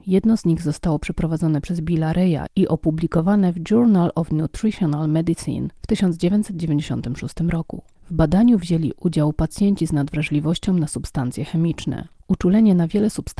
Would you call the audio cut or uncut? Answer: uncut